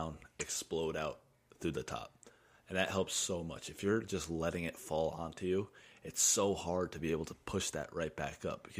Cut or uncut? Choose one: uncut